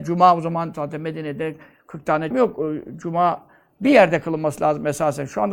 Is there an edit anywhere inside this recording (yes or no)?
yes